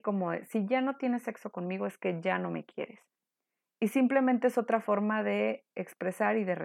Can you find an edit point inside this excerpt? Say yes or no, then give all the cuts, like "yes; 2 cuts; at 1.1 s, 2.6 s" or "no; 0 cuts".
no; 0 cuts